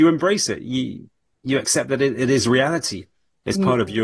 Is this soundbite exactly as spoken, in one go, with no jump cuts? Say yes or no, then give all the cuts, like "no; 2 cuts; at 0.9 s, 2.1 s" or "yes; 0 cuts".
yes; 0 cuts